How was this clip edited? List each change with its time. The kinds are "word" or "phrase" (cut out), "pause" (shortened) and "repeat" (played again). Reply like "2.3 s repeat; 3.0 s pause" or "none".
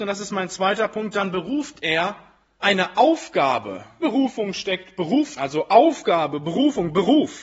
2.6 s word; 4.0 s word; 5.4 s word